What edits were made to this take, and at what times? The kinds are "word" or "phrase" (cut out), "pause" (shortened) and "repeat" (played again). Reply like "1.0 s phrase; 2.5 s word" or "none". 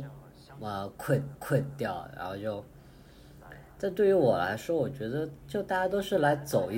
1.3 s repeat